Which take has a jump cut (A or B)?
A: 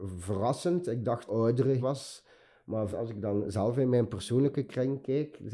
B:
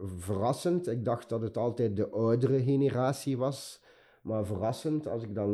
A